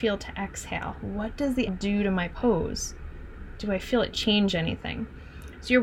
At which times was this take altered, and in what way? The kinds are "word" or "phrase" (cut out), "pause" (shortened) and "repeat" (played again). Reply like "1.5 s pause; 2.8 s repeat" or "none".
1.7 s word